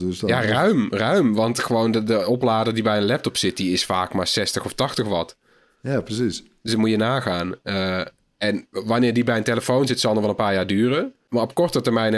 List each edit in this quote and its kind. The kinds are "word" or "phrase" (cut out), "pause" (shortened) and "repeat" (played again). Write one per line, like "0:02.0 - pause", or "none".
none